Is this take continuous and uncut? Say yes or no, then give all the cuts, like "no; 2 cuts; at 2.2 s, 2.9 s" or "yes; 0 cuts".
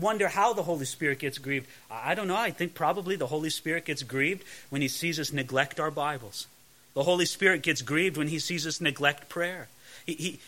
yes; 0 cuts